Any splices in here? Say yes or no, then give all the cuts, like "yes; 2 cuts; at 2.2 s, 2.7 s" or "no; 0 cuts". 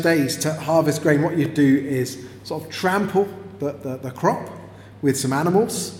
no; 0 cuts